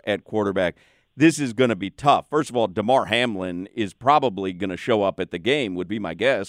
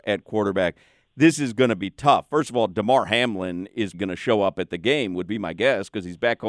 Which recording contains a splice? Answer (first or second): second